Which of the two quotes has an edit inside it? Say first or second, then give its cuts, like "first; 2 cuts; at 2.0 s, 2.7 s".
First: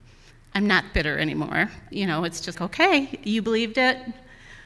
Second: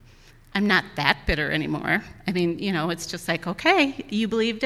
first; 3 cuts; at 0.9 s, 1.9 s, 2.5 s